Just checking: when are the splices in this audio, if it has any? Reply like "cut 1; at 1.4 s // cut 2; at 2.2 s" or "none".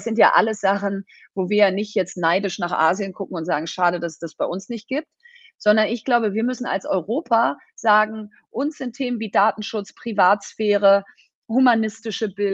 none